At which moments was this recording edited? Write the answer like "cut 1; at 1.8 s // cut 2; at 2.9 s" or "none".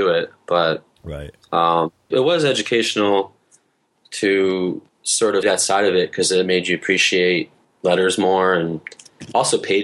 cut 1; at 2.1 s // cut 2; at 4.9 s // cut 3; at 5.4 s // cut 4; at 7.6 s